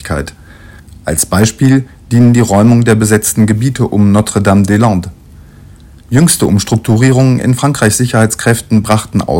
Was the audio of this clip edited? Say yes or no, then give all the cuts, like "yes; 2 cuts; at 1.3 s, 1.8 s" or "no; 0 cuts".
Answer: no; 0 cuts